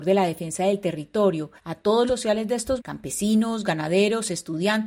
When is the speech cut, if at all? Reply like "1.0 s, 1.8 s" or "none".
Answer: 1.6 s, 2.1 s, 2.8 s